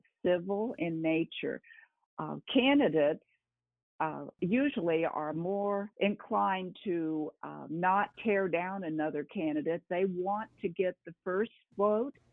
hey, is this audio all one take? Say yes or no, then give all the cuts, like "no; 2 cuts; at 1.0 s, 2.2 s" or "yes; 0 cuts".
no; 1 cut; at 5.9 s